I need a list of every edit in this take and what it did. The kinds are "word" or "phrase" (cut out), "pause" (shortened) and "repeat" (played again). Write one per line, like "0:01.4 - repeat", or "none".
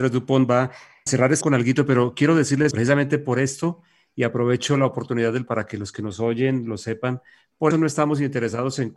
0:01.1 - word
0:01.4 - word
0:02.7 - word
0:05.5 - word
0:07.7 - word